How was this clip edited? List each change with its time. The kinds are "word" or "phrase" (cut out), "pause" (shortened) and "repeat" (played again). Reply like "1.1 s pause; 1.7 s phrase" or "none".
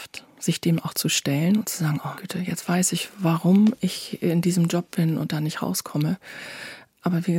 2.1 s word